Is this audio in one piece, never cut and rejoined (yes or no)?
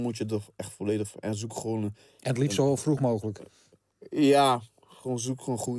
yes